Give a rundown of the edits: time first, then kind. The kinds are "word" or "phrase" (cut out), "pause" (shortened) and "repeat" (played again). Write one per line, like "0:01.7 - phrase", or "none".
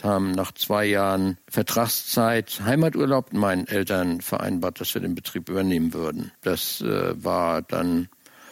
0:01.4 - pause
0:03.3 - phrase
0:06.3 - pause

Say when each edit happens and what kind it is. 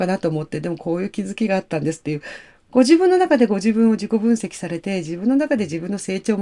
none

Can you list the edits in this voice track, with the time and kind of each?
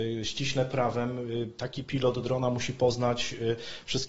none

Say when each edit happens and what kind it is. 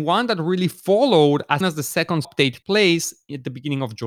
0:01.6 - word
0:02.2 - word
0:02.6 - word

